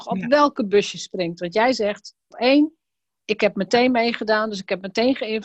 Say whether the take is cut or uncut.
cut